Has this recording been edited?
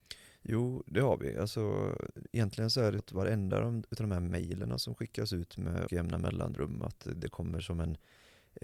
yes; 2 cuts; at 3.0 s, 5.9 s

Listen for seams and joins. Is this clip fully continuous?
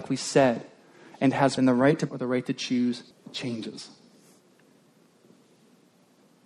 no; 3 cuts; at 1.6 s, 2.1 s, 3.1 s

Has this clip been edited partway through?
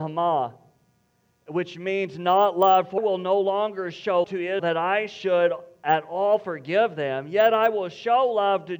yes; 3 cuts; at 3.0 s, 4.2 s, 4.6 s

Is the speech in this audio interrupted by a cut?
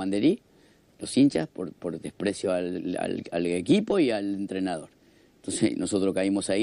no; 0 cuts

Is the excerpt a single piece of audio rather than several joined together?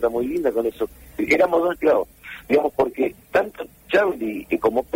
no; 2 cuts; at 1.7 s, 3.2 s

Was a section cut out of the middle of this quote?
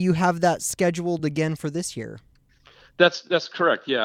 no; 0 cuts

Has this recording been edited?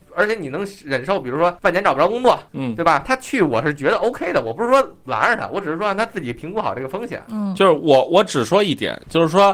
yes; 1 cut; at 2.5 s

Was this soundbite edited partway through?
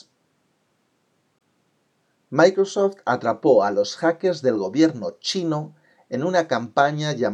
no; 0 cuts

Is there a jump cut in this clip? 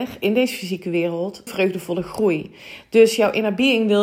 yes; 1 cut; at 1.5 s

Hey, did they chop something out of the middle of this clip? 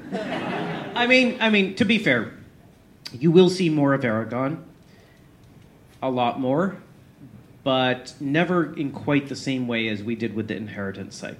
no; 0 cuts

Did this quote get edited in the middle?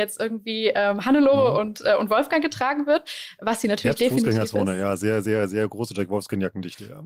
no; 0 cuts

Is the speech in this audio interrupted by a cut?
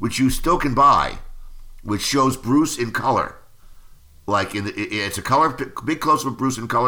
no; 0 cuts

